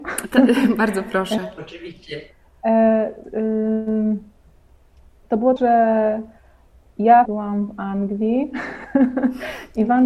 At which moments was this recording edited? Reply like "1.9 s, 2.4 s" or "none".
3.2 s, 5.6 s, 7.2 s